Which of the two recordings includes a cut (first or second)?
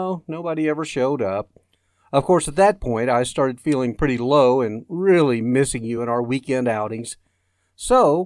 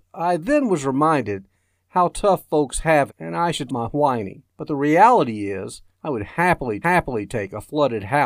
second